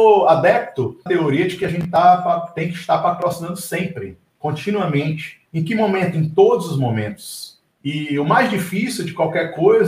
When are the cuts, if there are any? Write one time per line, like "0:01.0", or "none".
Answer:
0:01.1
0:05.5
0:07.7